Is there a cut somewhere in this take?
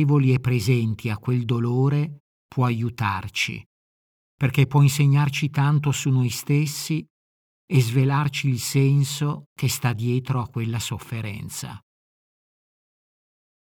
no; 0 cuts

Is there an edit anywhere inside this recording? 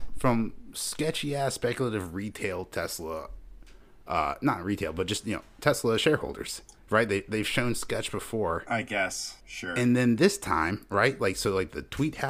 no; 0 cuts

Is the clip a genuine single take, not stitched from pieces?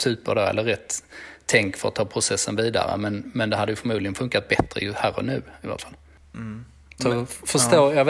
yes; 0 cuts

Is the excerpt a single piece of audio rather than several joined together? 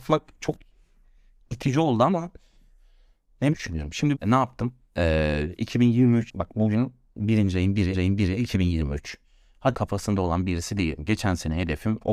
no; 5 cuts; at 3.5 s, 4.1 s, 6.3 s, 7.9 s, 9.7 s

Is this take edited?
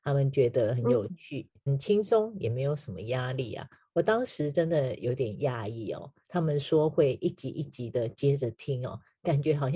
yes; 1 cut; at 1.7 s

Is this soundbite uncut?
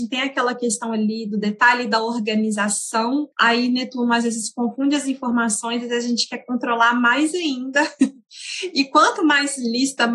no; 1 cut; at 3.3 s

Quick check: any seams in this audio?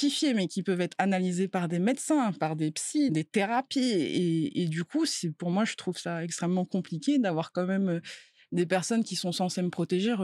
yes; 1 cut; at 3.1 s

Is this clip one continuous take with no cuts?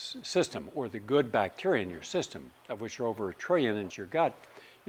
no; 1 cut; at 3.9 s

